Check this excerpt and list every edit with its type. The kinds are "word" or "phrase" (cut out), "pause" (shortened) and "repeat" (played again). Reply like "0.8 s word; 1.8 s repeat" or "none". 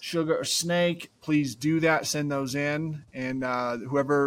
1.2 s pause

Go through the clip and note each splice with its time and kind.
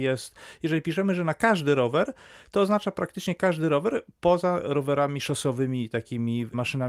none

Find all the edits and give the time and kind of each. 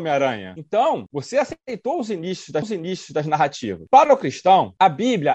2.6 s repeat

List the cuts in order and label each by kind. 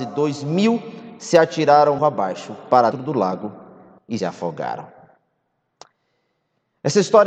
2.0 s word; 2.9 s word; 4.2 s word

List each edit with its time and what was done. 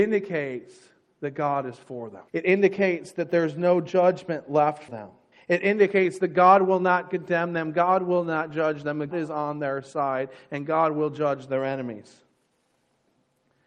2.3 s pause; 4.9 s word; 5.3 s pause; 9.1 s word

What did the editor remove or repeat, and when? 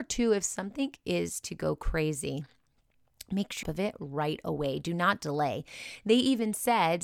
3.6 s phrase

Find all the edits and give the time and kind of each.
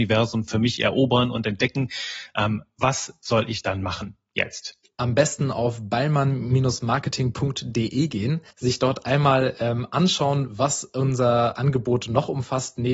4.8 s pause; 8.5 s pause

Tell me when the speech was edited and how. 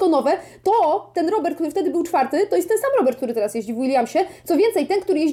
none

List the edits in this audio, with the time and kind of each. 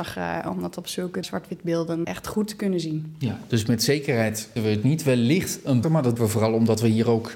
1.2 s word; 2.0 s word; 4.6 s word; 5.8 s word; 6.2 s word

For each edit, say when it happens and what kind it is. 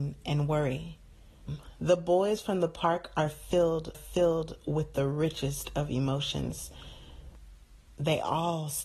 3.9 s repeat

